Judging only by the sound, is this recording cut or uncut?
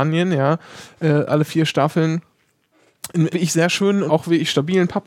cut